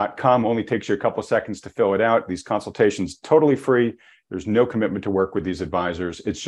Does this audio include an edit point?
no; 0 cuts

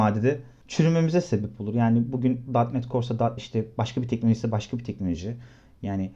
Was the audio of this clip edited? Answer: yes; 1 cut; at 3.4 s

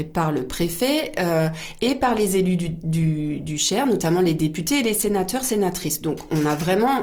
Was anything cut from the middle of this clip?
no; 0 cuts

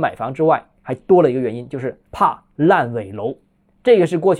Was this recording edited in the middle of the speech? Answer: yes; 1 cut; at 2.1 s

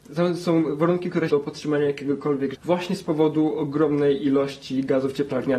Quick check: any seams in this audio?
yes; 2 cuts; at 1.3 s, 2.5 s

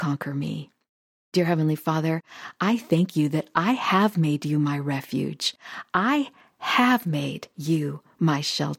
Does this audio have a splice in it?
no; 0 cuts

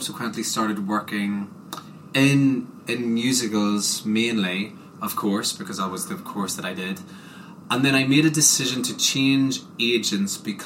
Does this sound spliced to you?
no; 0 cuts

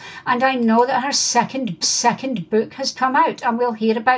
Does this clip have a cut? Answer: yes; 2 cuts; at 1.8 s, 2.9 s

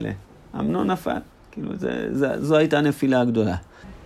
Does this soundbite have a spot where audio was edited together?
no; 0 cuts

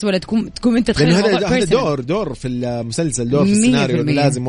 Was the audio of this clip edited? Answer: no; 0 cuts

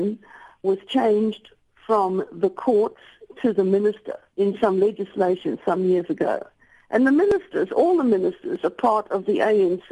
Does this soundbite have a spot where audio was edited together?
no; 0 cuts

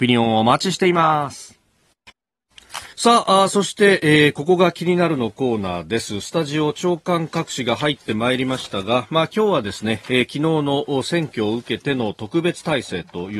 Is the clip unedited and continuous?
no; 1 cut; at 2.9 s

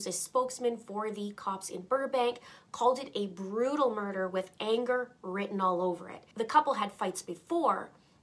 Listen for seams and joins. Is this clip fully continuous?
yes; 0 cuts

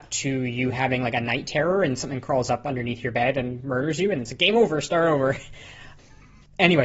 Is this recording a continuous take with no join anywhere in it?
yes; 0 cuts

